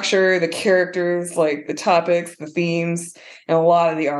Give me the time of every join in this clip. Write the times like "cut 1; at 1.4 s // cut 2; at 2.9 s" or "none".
none